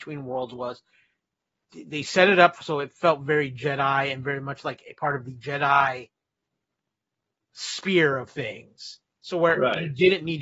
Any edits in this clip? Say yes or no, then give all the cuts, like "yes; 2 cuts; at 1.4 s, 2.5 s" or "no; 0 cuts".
no; 0 cuts